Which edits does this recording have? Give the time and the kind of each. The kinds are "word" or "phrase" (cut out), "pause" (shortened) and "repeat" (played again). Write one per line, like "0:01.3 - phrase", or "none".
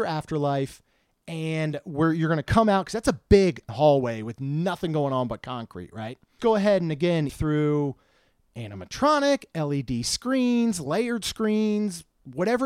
0:03.7 - word
0:06.4 - phrase
0:07.3 - word